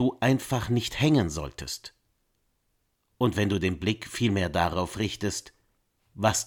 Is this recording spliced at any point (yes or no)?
no